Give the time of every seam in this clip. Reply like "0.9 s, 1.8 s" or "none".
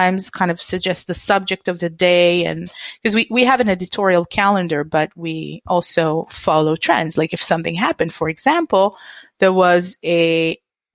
none